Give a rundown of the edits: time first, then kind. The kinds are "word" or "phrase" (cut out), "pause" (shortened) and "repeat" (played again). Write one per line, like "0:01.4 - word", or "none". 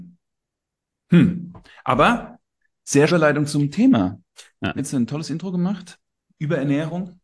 0:03.1 - word
0:04.8 - word